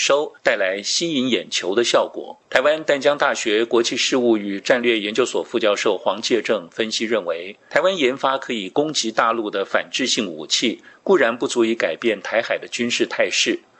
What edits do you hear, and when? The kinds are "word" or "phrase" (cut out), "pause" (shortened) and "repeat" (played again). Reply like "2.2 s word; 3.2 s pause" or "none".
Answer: 2.4 s pause